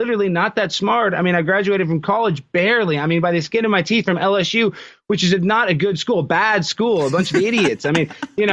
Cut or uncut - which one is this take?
uncut